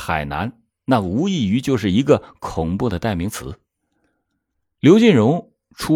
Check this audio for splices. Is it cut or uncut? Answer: uncut